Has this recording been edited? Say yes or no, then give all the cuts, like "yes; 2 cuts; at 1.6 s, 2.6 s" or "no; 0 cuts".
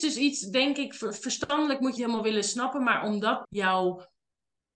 yes; 2 cuts; at 2.0 s, 3.4 s